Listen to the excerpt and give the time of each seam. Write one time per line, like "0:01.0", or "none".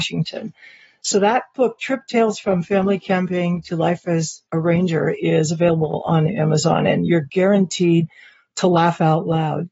none